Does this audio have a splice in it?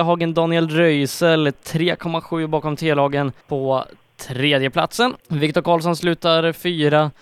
yes; 2 cuts; at 3.4 s, 5.2 s

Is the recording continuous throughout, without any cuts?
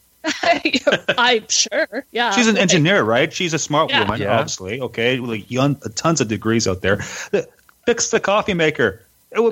yes; 0 cuts

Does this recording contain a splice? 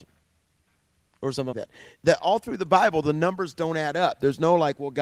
yes; 1 cut; at 1.5 s

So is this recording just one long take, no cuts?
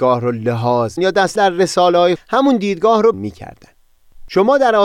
no; 4 cuts; at 1.0 s, 1.4 s, 2.2 s, 3.1 s

